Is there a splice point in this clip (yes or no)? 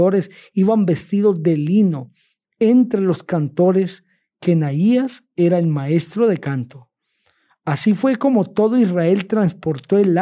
no